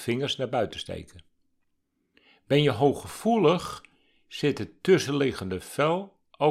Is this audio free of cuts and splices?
yes; 0 cuts

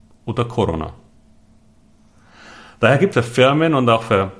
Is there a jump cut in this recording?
yes; 1 cut; at 3.1 s

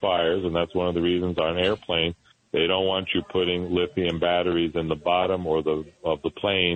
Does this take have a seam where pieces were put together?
no; 0 cuts

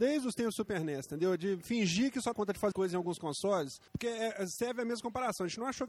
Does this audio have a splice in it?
yes; 3 cuts; at 2.3 s, 2.7 s, 3.9 s

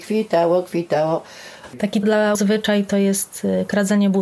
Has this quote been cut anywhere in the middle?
yes; 2 cuts; at 2.0 s, 2.3 s

